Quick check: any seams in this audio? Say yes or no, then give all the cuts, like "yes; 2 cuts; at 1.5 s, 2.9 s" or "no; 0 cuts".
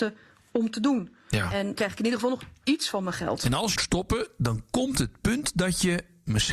yes; 2 cuts; at 1.8 s, 3.8 s